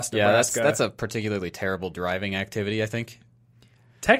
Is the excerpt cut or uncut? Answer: uncut